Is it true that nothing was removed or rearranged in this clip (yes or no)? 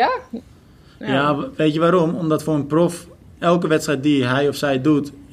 yes